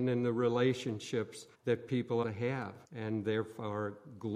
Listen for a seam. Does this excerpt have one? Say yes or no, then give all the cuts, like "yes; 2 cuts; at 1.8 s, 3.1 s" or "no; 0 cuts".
yes; 3 cuts; at 1.5 s, 2.2 s, 2.8 s